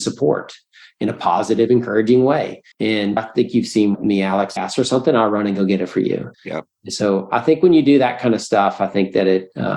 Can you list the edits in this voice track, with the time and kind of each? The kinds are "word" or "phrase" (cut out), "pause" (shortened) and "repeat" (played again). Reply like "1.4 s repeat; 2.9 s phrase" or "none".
2.7 s pause; 4.6 s phrase; 6.3 s pause